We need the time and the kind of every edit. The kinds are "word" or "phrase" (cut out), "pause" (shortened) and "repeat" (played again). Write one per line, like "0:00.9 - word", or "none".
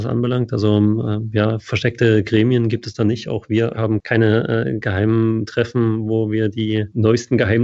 0:03.7 - phrase